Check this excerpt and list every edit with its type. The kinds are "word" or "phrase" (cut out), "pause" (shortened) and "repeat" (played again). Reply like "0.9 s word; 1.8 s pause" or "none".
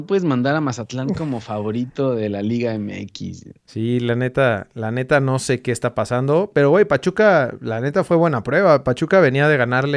none